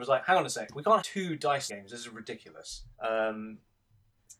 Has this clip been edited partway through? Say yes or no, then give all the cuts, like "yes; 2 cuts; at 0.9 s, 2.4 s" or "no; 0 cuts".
yes; 3 cuts; at 1.0 s, 1.7 s, 2.9 s